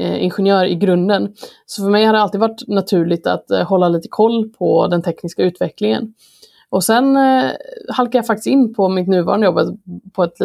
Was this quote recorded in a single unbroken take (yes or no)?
yes